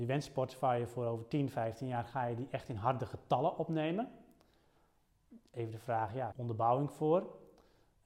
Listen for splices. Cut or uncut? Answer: cut